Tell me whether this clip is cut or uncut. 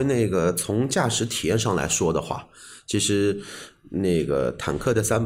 uncut